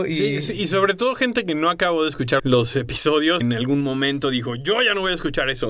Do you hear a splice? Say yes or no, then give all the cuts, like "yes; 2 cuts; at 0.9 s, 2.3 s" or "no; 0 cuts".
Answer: yes; 2 cuts; at 2.4 s, 3.4 s